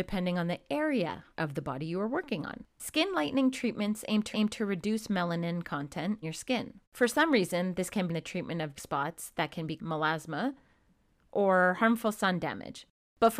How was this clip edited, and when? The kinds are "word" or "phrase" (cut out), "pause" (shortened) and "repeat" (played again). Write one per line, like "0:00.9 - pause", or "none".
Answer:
0:01.3 - pause
0:02.7 - pause
0:04.3 - repeat
0:06.2 - word
0:06.8 - pause
0:08.1 - phrase
0:08.8 - word
0:09.8 - phrase